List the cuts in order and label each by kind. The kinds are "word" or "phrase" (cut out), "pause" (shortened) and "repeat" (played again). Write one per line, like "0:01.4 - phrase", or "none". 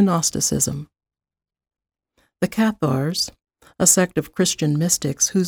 none